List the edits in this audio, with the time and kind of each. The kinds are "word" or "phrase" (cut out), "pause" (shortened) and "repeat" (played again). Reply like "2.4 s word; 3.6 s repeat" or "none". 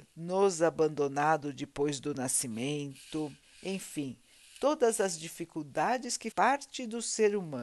3.4 s pause; 6.3 s word